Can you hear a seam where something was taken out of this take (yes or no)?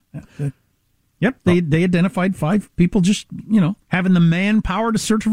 yes